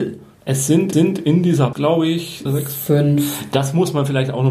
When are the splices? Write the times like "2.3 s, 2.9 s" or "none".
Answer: 0.9 s, 1.7 s, 2.5 s